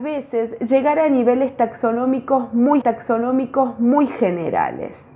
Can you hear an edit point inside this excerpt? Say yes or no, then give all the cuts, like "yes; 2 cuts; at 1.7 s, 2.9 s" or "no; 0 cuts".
yes; 1 cut; at 2.8 s